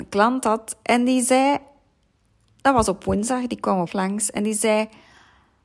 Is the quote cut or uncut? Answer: cut